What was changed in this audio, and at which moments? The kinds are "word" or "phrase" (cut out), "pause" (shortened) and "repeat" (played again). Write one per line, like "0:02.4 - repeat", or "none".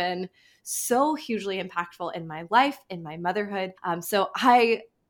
0:03.8 - pause